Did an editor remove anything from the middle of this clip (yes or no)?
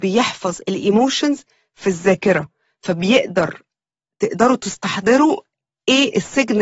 no